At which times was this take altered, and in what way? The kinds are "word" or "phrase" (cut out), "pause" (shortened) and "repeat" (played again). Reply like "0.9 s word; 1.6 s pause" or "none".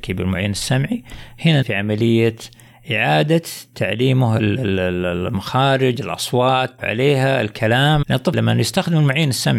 1.6 s word; 6.8 s word; 8.0 s word; 8.3 s word